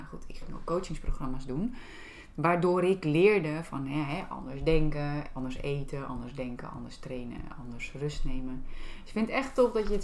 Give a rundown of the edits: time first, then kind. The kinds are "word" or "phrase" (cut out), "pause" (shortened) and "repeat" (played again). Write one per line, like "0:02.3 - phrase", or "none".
none